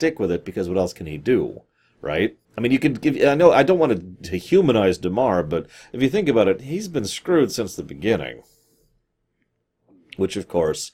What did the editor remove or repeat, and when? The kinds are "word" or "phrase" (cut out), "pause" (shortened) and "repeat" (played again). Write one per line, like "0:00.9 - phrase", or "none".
0:02.4 - pause